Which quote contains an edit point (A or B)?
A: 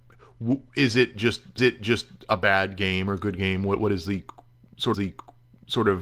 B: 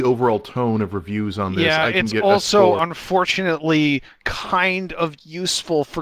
A